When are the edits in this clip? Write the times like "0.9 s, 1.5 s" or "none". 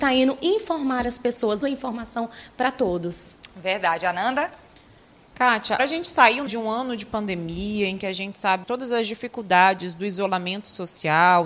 1.6 s, 5.8 s, 6.5 s, 8.6 s